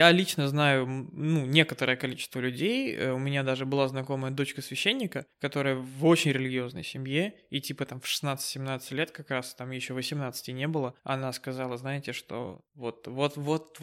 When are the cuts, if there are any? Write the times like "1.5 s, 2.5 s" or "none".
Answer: 5.3 s, 11.0 s, 12.7 s